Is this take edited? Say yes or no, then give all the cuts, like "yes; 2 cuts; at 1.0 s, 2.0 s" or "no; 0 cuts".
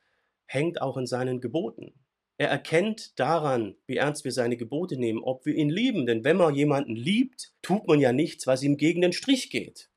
yes; 3 cuts; at 2.1 s, 3.8 s, 7.6 s